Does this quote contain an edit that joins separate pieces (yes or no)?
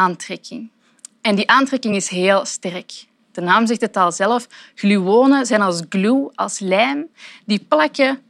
no